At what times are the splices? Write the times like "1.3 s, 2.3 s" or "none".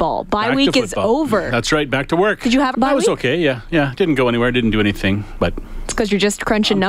2.7 s, 5.4 s